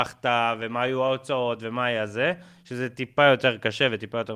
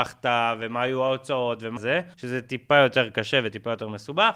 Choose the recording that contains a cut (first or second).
second